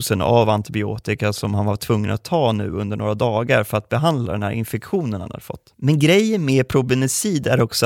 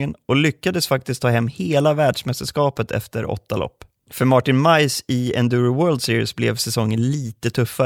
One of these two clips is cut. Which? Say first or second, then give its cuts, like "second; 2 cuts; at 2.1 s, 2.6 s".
first; 1 cut; at 5.7 s